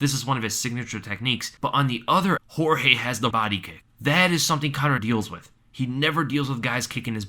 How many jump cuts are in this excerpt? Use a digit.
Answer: 3